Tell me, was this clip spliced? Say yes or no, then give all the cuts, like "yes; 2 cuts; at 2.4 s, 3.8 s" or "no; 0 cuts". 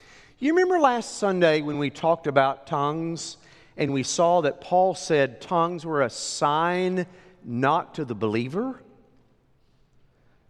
no; 0 cuts